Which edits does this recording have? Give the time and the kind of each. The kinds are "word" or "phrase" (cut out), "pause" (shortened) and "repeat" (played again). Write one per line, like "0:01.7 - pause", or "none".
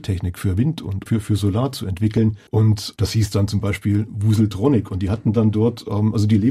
0:02.5 - pause